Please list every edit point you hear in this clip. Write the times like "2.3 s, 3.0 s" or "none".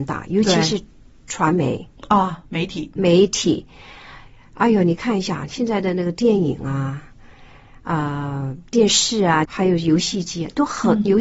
3.0 s, 9.4 s